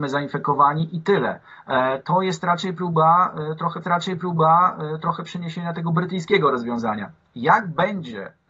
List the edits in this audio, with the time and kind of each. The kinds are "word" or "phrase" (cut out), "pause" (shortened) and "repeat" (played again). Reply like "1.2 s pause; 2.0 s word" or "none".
3.8 s repeat